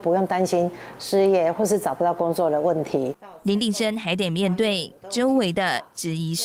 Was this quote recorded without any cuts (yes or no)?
yes